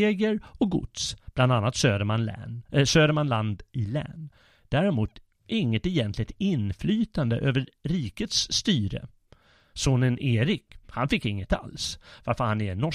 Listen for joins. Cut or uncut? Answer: uncut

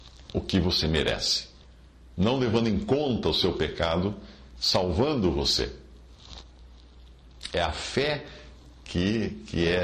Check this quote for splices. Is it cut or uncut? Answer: uncut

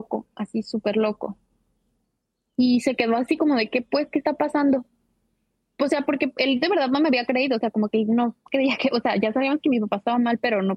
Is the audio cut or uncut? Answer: uncut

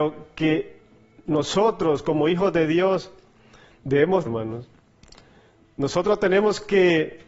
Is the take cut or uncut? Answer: cut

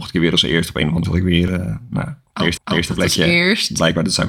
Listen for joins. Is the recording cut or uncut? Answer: cut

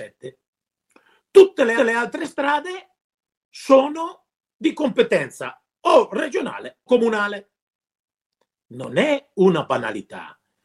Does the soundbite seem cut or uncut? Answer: cut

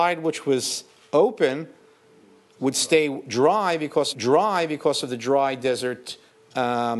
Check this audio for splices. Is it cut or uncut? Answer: cut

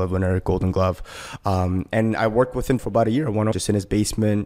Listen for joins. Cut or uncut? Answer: cut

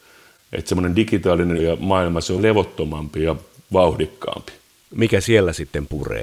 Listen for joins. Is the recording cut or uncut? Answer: cut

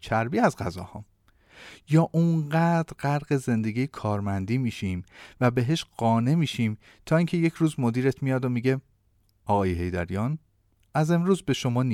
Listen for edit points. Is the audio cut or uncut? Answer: uncut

